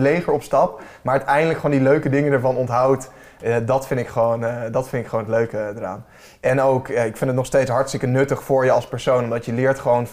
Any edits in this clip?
no; 0 cuts

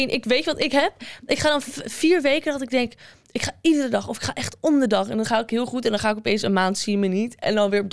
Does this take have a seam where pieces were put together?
no; 0 cuts

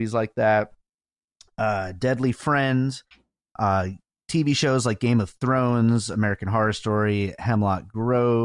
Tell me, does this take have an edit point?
no; 0 cuts

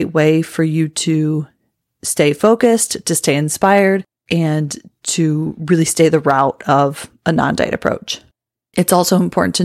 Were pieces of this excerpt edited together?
no; 0 cuts

